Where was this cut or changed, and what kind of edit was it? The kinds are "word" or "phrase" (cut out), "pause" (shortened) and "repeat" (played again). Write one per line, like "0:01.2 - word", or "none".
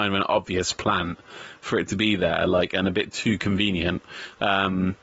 none